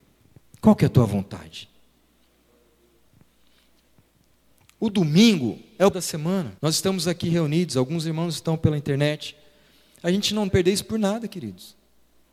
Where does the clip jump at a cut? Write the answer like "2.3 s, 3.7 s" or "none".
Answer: 5.9 s, 6.6 s, 10.5 s